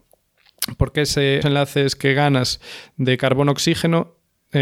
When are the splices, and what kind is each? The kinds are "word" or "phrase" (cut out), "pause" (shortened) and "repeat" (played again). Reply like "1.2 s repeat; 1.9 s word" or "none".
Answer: 1.4 s word